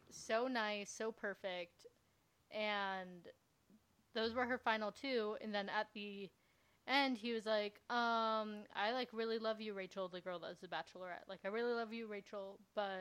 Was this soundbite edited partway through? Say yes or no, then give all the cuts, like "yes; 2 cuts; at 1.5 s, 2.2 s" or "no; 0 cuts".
no; 0 cuts